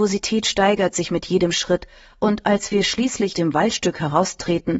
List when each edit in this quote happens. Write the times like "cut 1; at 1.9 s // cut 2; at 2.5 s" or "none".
cut 1; at 3.3 s